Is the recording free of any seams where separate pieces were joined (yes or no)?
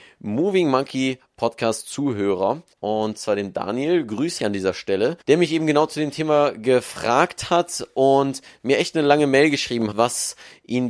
no